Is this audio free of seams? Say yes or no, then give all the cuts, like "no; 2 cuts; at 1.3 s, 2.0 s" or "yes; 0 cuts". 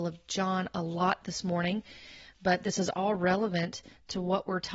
yes; 0 cuts